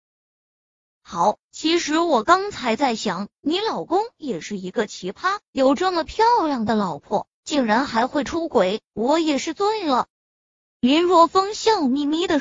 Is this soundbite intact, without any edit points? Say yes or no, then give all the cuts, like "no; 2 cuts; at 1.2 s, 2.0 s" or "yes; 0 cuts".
no; 1 cut; at 10.1 s